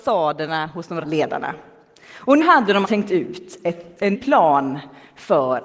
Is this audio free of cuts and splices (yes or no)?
no